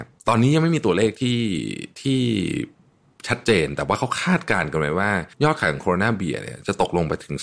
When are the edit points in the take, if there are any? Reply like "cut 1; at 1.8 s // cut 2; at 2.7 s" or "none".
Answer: cut 1; at 5.3 s

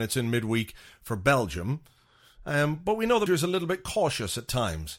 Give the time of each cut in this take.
cut 1; at 3.3 s

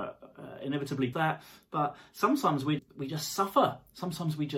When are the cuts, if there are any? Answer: cut 1; at 1.1 s // cut 2; at 2.8 s

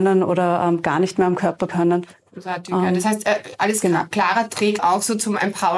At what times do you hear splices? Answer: cut 1; at 1.7 s // cut 2; at 4.8 s

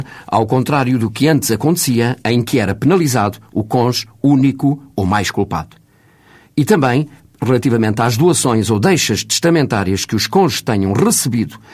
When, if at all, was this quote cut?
none

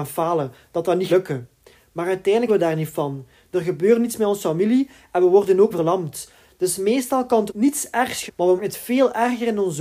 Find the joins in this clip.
cut 1; at 1.1 s // cut 2; at 2.5 s // cut 3; at 5.7 s // cut 4; at 7.5 s // cut 5; at 8.3 s // cut 6; at 8.6 s

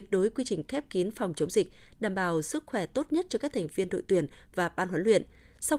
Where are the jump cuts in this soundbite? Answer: none

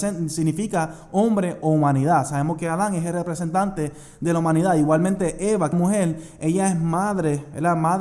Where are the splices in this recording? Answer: cut 1; at 5.7 s

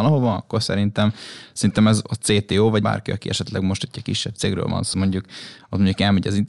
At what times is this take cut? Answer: cut 1; at 2.8 s // cut 2; at 4.9 s

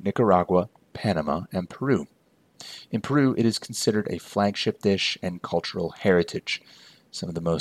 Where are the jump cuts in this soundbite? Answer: none

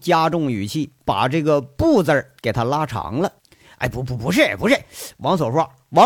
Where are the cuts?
cut 1; at 2.4 s // cut 2; at 3.4 s

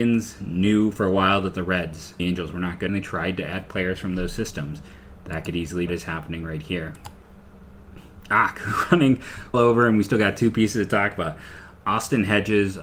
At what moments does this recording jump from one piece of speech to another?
cut 1; at 2.2 s // cut 2; at 2.9 s // cut 3; at 5.9 s // cut 4; at 9.5 s

